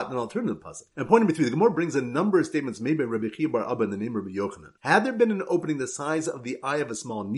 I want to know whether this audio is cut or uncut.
cut